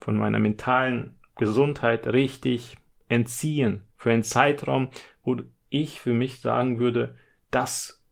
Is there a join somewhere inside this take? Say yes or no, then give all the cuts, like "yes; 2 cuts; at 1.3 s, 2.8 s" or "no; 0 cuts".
yes; 2 cuts; at 1.3 s, 3.9 s